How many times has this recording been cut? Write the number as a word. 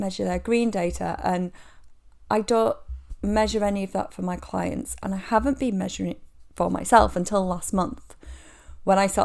zero